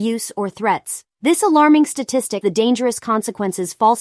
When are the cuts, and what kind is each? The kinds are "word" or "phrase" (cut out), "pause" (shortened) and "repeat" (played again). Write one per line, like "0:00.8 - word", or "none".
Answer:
0:01.1 - pause
0:02.4 - word

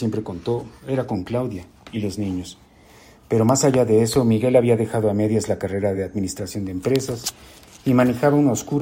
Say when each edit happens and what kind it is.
none

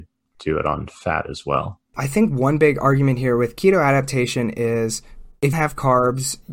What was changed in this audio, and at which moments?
0:05.5 - phrase

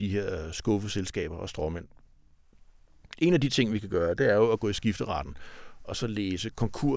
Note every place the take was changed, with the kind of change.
none

